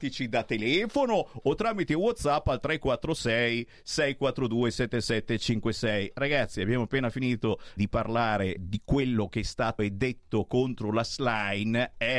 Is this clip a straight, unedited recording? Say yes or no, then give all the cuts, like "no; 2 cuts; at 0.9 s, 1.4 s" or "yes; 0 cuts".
no; 3 cuts; at 7.8 s, 8.6 s, 9.8 s